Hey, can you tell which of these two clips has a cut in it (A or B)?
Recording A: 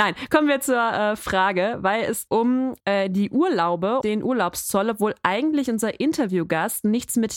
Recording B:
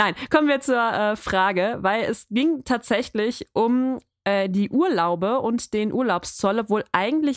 A